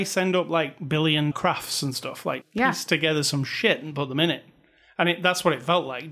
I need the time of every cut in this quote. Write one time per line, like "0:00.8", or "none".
0:01.3
0:02.4